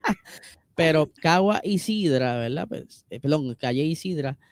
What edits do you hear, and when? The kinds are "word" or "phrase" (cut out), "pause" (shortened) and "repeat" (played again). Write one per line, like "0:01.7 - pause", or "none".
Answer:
0:01.2 - pause